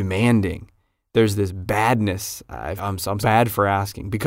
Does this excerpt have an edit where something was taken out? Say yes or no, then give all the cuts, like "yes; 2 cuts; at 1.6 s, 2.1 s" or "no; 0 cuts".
yes; 2 cuts; at 2.8 s, 3.2 s